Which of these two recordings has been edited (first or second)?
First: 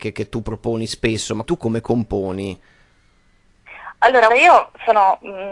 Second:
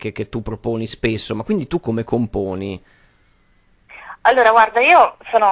first